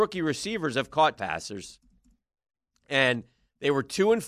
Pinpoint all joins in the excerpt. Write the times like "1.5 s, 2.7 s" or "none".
1.2 s